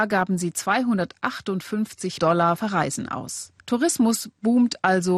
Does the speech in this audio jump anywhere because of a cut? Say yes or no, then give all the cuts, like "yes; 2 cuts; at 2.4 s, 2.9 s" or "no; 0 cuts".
yes; 3 cuts; at 2.2 s, 2.6 s, 3.6 s